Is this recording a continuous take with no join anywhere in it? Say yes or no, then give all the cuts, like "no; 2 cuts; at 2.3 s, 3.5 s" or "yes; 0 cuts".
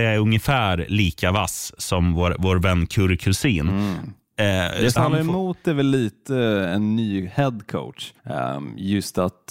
no; 2 cuts; at 5.0 s, 8.2 s